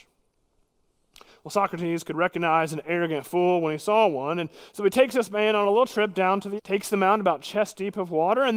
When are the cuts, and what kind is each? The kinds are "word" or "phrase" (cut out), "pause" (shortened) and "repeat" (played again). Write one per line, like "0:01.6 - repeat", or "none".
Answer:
0:06.6 - word